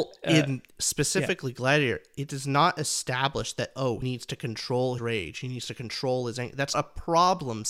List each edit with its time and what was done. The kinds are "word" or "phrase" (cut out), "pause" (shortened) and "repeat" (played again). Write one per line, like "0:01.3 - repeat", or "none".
0:04.0 - word
0:05.0 - word
0:06.7 - word